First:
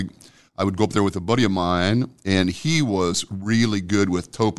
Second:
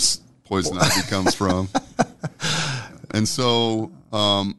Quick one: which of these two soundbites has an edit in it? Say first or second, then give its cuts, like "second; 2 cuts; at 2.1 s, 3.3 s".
second; 1 cut; at 3.1 s